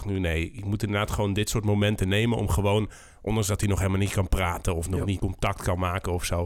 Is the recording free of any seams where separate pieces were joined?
no; 1 cut; at 5.2 s

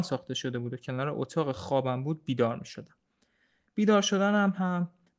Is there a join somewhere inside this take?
no; 0 cuts

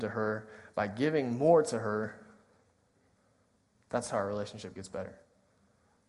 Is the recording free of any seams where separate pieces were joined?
yes; 0 cuts

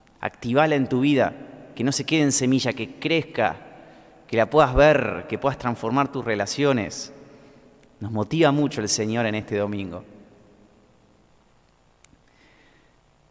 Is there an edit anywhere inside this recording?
no; 0 cuts

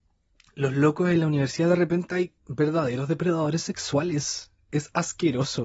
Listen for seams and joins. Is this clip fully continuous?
no; 1 cut; at 2.4 s

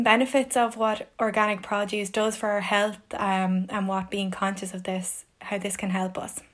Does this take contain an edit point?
no; 0 cuts

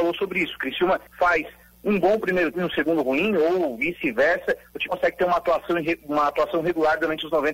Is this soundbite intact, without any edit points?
no; 3 cuts; at 1.1 s, 2.5 s, 4.9 s

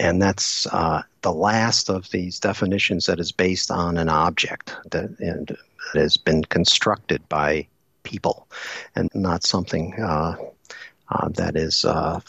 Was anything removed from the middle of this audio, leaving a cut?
yes; 2 cuts; at 5.9 s, 9.1 s

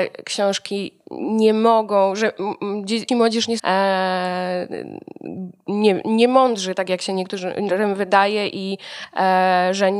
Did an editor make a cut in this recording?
yes; 2 cuts; at 3.1 s, 3.6 s

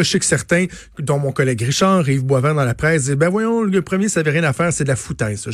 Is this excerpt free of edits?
yes; 0 cuts

